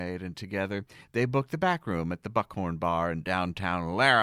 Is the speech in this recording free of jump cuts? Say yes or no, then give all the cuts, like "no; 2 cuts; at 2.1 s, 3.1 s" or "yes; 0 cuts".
yes; 0 cuts